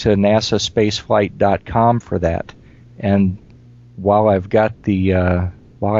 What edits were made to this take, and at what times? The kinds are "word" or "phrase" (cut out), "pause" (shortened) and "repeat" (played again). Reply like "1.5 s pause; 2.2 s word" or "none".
none